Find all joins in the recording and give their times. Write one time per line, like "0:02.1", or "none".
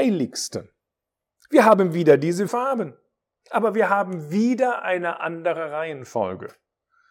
0:02.5